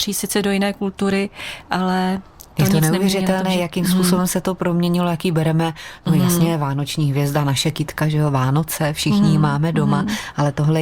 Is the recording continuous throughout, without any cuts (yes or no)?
yes